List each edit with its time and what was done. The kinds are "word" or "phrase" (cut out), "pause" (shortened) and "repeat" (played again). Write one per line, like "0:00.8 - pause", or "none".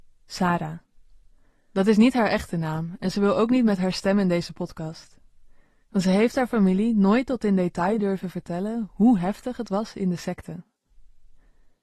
none

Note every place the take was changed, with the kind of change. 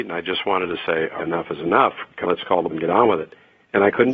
0:01.2 - word
0:02.2 - word
0:02.7 - word

